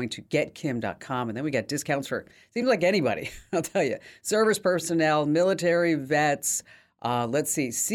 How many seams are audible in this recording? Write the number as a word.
zero